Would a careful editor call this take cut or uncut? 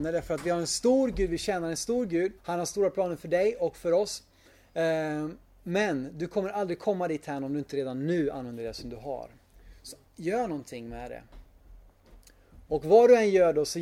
cut